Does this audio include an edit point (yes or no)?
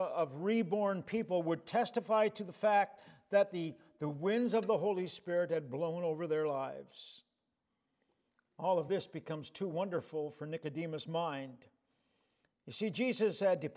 no